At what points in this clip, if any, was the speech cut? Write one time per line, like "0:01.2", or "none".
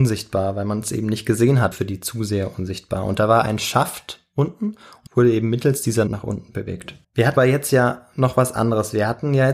0:01.7
0:05.1
0:06.1
0:07.0
0:07.4